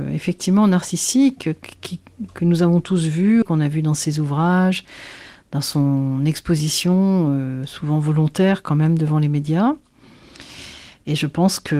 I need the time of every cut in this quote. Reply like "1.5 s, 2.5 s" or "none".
3.4 s